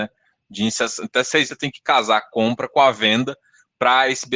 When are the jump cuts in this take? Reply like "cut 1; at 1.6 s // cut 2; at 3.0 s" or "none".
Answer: cut 1; at 1.5 s